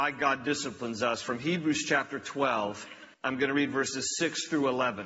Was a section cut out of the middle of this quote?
yes; 1 cut; at 3.1 s

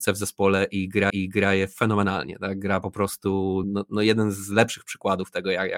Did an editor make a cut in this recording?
yes; 2 cuts; at 1.1 s, 3.6 s

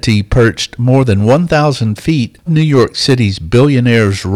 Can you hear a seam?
yes; 1 cut; at 2.5 s

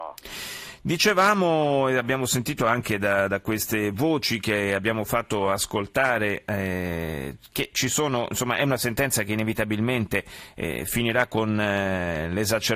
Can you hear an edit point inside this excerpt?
no; 0 cuts

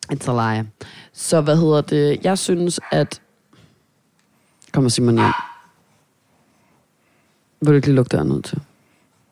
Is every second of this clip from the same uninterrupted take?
yes; 0 cuts

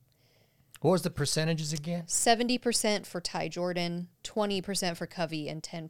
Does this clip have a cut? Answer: yes; 1 cut; at 4.1 s

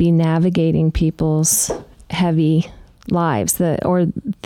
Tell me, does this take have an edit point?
no; 0 cuts

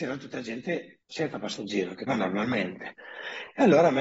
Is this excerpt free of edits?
no; 2 cuts; at 1.0 s, 2.1 s

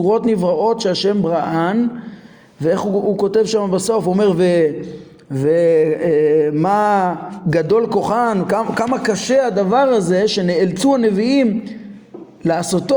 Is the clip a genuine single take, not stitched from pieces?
yes; 0 cuts

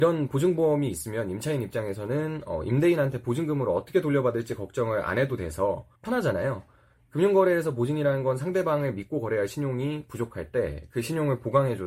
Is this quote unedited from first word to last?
no; 1 cut; at 6.0 s

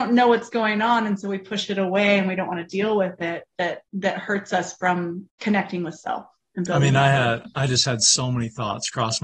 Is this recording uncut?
no; 2 cuts; at 3.9 s, 5.3 s

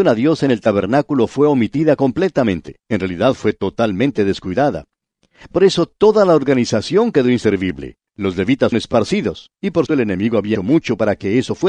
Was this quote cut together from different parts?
yes; 5 cuts; at 2.8 s, 8.1 s, 8.7 s, 9.9 s, 10.6 s

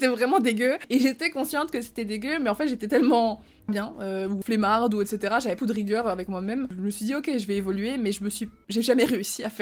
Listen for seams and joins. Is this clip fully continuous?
no; 3 cuts; at 3.7 s, 4.4 s, 5.6 s

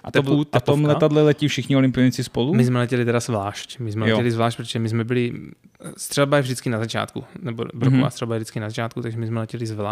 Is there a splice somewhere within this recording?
no; 0 cuts

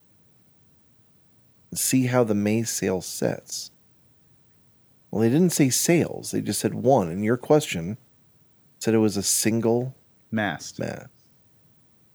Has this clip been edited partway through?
no; 0 cuts

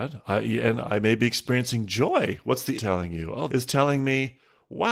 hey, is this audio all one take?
no; 2 cuts; at 2.8 s, 3.5 s

